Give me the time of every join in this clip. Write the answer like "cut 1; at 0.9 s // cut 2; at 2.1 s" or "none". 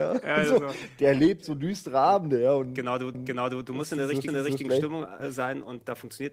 cut 1; at 3.1 s // cut 2; at 4.3 s